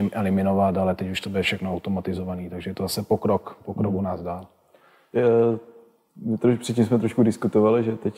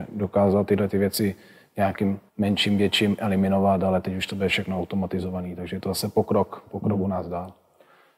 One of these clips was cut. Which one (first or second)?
second